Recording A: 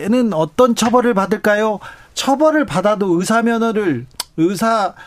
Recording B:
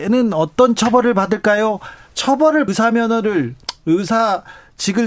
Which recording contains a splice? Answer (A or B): B